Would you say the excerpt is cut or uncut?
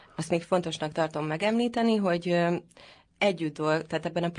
uncut